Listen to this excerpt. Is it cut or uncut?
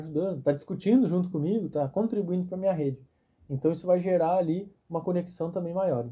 uncut